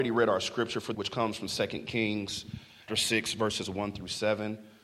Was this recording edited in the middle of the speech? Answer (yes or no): yes